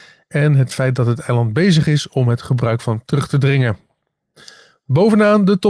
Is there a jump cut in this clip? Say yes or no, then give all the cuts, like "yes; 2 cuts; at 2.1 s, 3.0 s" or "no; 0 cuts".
yes; 1 cut; at 3.1 s